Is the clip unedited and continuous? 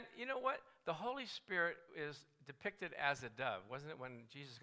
yes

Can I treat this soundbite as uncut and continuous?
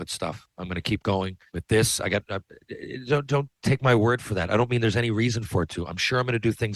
no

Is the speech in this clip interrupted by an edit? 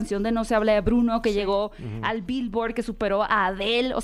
no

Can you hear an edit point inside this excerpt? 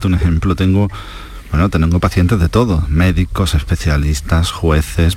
no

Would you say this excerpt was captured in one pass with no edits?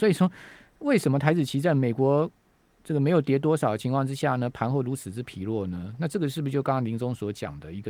yes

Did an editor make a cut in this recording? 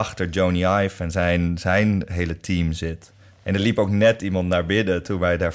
no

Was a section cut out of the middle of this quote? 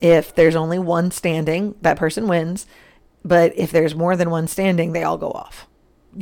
no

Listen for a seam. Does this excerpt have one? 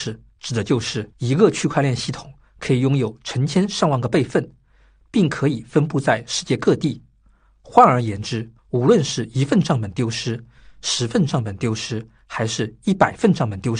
yes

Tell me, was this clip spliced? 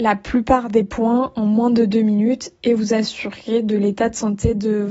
yes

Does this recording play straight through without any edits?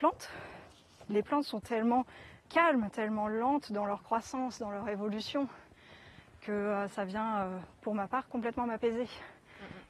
no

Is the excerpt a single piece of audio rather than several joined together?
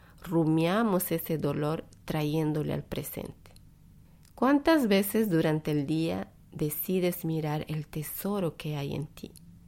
yes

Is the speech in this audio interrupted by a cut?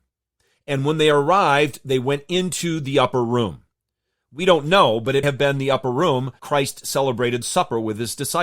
yes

